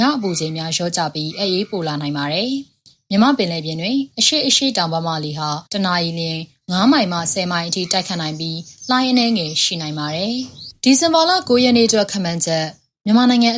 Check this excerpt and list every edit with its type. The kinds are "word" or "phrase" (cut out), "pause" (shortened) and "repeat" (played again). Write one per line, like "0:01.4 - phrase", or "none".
0:05.7 - pause